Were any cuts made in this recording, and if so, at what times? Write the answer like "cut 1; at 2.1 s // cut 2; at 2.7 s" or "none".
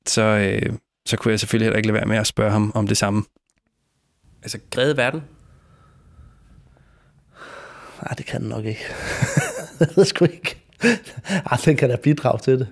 cut 1; at 4.8 s